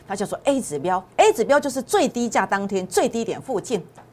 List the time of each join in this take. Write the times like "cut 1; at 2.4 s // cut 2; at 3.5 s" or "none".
cut 1; at 1.1 s